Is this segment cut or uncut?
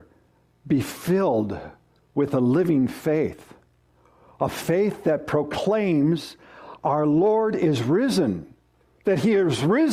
uncut